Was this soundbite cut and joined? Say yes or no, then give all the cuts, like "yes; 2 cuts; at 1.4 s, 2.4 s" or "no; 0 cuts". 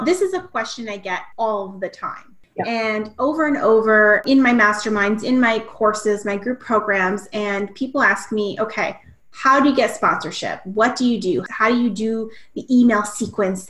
no; 0 cuts